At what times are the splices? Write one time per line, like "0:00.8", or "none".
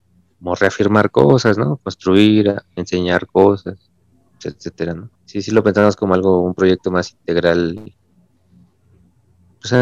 0:05.2